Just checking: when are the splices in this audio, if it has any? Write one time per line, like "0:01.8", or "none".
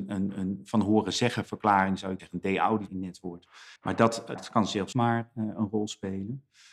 0:02.2
0:02.9
0:03.8
0:04.4
0:04.9

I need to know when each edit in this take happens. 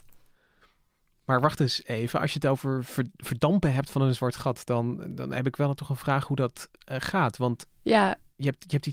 none

